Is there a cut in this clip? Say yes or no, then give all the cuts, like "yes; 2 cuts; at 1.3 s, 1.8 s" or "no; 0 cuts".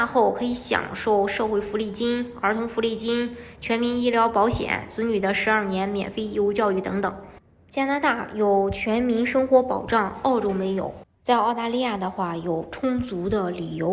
yes; 1 cut; at 11.1 s